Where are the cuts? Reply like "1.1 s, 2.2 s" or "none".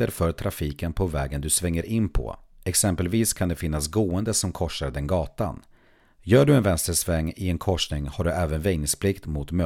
none

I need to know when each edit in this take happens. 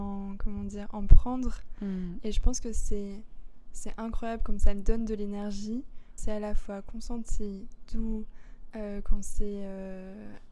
6.2 s

